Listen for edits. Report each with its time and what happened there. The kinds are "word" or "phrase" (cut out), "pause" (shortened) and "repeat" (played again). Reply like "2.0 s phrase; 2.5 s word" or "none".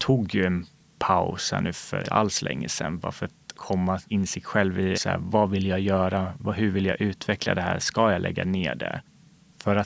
2.0 s word; 4.1 s word; 4.9 s word